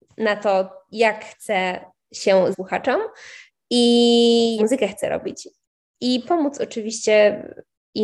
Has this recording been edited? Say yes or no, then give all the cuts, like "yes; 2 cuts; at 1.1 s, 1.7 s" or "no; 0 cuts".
yes; 3 cuts; at 2.5 s, 4.6 s, 6.2 s